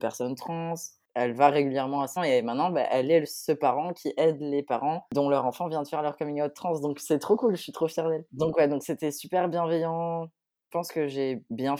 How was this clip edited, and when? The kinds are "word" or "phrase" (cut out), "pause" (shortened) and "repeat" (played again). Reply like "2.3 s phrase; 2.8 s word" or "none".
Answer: 2.2 s word